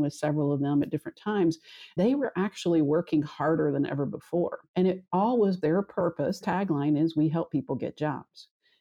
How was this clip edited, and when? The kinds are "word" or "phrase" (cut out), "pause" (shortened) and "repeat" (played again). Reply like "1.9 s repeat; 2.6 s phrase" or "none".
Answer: 2.0 s word; 4.7 s pause; 5.6 s word; 6.4 s word

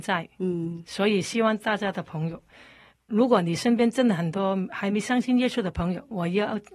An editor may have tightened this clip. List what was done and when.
none

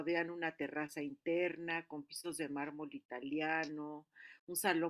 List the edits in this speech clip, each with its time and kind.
none

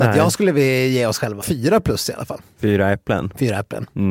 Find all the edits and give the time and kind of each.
1.4 s word

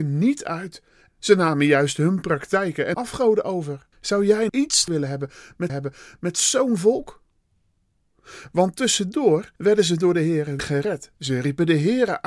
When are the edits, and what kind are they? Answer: 1.1 s word; 2.9 s word; 3.9 s pause; 4.5 s word; 4.9 s word; 5.7 s repeat; 9.6 s pause; 10.6 s word

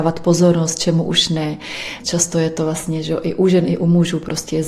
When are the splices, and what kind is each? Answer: none

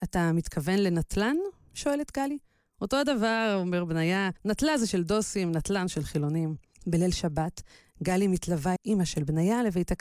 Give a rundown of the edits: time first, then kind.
4.4 s pause; 6.7 s pause; 8.8 s phrase

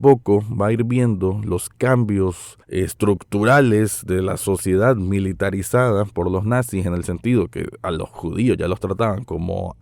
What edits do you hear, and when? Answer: 2.6 s pause

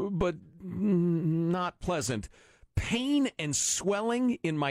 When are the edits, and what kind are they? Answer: none

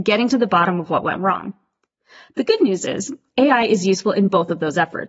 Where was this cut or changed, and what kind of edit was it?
none

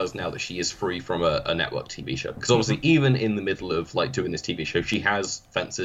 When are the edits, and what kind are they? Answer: none

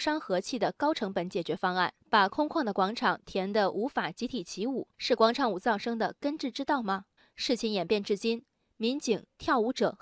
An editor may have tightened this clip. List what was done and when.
2.0 s pause; 4.9 s pause; 7.2 s pause

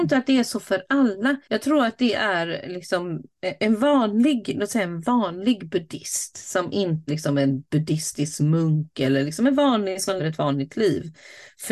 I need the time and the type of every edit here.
1.4 s pause; 3.6 s word; 7.1 s word; 10.2 s word

